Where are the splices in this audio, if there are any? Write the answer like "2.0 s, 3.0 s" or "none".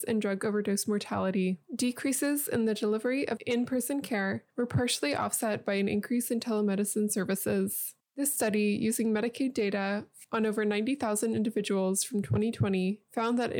1.6 s